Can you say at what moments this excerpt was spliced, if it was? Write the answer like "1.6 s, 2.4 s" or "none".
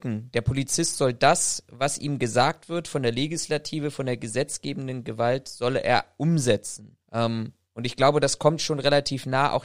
7.0 s